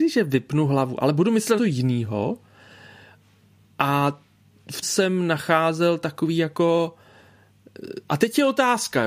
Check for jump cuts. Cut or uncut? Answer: cut